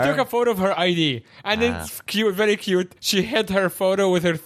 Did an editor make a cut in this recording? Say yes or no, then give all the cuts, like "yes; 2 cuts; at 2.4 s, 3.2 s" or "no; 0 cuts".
yes; 1 cut; at 3.0 s